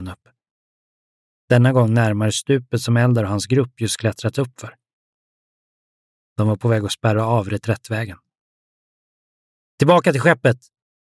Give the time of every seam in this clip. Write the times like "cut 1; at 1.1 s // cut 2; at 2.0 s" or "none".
none